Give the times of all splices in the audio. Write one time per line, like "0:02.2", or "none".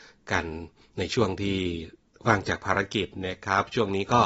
none